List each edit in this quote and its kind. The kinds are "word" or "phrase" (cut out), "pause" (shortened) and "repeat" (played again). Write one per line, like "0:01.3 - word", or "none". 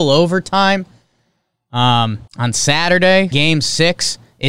0:02.3 - pause
0:03.3 - word